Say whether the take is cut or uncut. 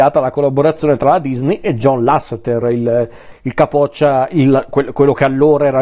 uncut